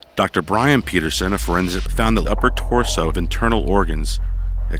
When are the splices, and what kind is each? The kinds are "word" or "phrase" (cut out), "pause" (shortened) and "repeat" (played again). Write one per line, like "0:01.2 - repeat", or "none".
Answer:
0:01.9 - word
0:02.2 - word
0:03.1 - phrase